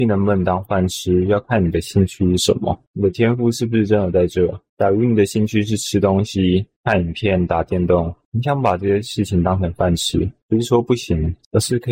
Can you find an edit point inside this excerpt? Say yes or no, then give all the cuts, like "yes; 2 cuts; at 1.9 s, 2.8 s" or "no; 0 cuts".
no; 0 cuts